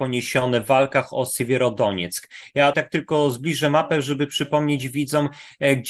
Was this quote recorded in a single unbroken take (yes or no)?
no